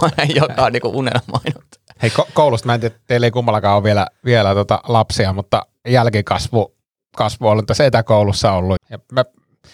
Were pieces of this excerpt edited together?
yes; 1 cut; at 8.8 s

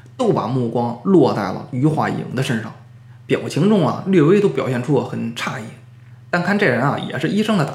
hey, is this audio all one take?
yes; 0 cuts

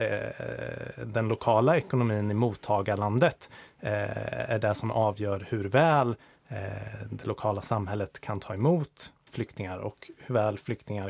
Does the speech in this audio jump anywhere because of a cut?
no; 0 cuts

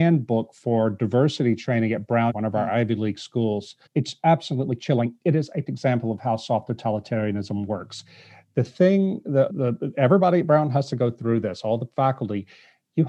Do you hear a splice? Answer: yes; 4 cuts; at 2.3 s, 3.9 s, 5.7 s, 9.5 s

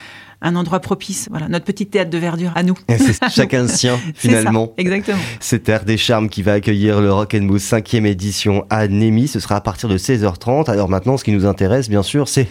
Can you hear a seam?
yes; 3 cuts; at 1.2 s, 2.5 s, 3.1 s

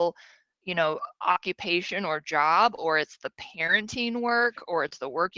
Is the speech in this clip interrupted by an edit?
no; 0 cuts

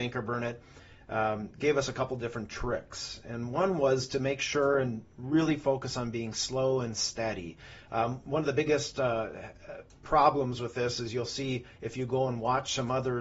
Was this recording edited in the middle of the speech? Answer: no; 0 cuts

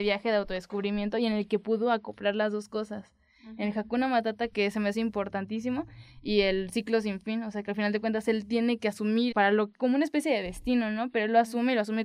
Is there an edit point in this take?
yes; 2 cuts; at 9.3 s, 9.7 s

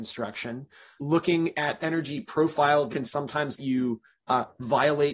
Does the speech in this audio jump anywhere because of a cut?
yes; 4 cuts; at 1.0 s, 1.8 s, 2.9 s, 3.6 s

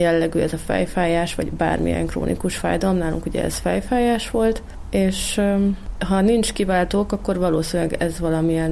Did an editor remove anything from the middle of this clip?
no; 0 cuts

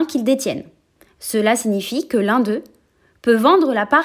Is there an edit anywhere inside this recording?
no; 0 cuts

